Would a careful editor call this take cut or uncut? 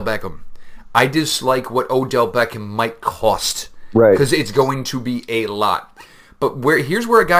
uncut